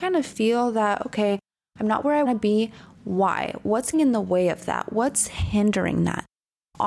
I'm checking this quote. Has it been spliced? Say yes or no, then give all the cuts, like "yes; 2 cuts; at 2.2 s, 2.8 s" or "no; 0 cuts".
yes; 2 cuts; at 2.3 s, 3.9 s